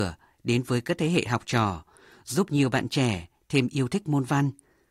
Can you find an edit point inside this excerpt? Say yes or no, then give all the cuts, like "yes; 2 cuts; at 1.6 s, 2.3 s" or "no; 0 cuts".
no; 0 cuts